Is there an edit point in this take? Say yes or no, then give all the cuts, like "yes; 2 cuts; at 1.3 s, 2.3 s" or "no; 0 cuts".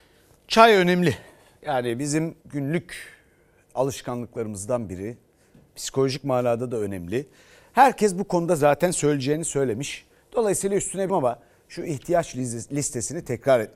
yes; 2 cuts; at 2.4 s, 11.1 s